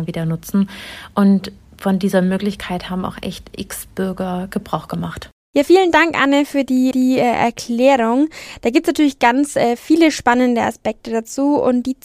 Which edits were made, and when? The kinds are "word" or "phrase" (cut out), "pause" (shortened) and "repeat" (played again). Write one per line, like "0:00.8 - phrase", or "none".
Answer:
0:06.9 - repeat